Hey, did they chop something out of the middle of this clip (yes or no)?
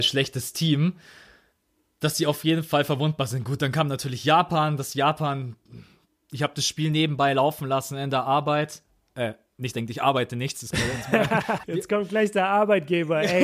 yes